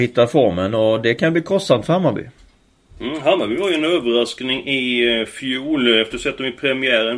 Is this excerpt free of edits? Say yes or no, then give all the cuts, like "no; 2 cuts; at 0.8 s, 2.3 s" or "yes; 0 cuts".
yes; 0 cuts